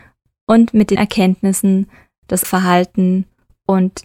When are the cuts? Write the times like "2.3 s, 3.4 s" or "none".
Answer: 1.0 s, 2.4 s